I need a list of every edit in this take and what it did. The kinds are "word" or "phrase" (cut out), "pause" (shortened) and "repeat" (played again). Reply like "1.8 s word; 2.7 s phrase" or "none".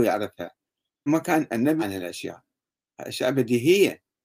1.1 s word; 1.8 s phrase